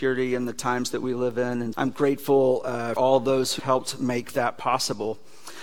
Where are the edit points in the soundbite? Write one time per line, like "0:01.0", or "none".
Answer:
0:01.7
0:03.0
0:03.6

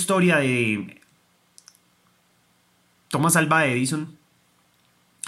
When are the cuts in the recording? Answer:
none

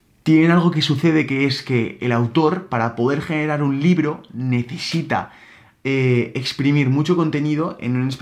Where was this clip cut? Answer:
none

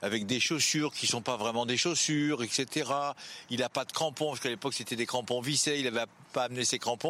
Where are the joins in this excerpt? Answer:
none

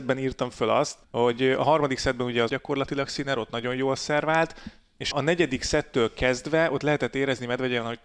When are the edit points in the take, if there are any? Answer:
0:01.0
0:02.5
0:05.1

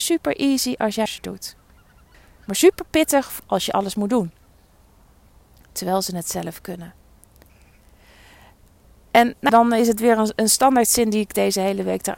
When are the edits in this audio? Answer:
0:01.1
0:02.1
0:03.4
0:09.5

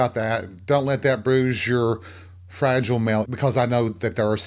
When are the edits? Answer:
0:03.3

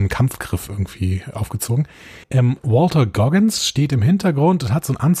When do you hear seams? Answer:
0:02.2

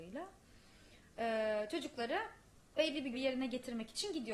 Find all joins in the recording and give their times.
0:02.7
0:03.1

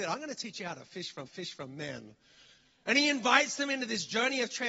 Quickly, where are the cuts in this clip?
0:01.3

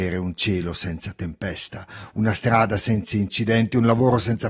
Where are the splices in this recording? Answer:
none

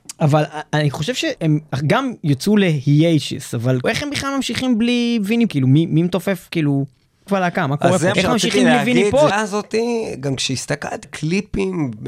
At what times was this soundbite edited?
0:01.4
0:03.8
0:05.5
0:07.3
0:08.1
0:09.3
0:11.0

